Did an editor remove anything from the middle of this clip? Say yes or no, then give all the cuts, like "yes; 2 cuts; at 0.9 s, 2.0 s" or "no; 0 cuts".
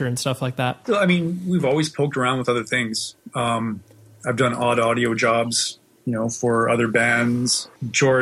no; 0 cuts